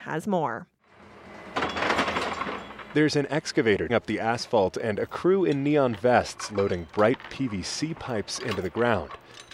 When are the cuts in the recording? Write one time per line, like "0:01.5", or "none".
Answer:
0:03.9
0:07.2